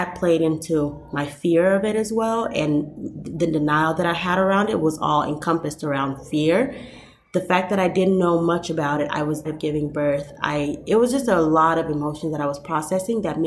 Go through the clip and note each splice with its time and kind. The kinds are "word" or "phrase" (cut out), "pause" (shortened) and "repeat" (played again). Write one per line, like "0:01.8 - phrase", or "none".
0:09.4 - word